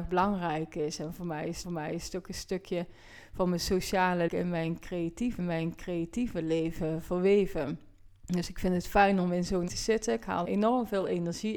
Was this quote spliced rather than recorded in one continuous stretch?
yes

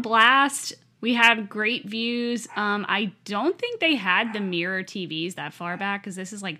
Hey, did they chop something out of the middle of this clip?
no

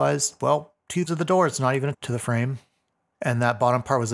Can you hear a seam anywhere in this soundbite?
yes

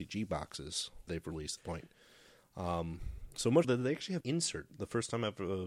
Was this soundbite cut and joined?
yes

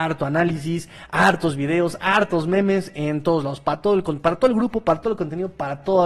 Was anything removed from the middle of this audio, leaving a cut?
no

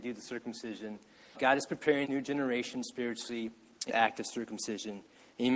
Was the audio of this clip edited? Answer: yes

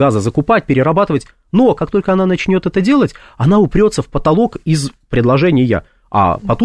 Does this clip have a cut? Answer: no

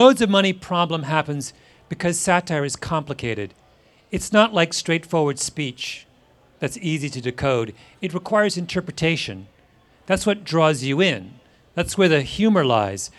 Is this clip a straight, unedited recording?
yes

